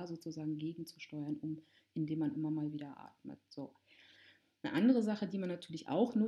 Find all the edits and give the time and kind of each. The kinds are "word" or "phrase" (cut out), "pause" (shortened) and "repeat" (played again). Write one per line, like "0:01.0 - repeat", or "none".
none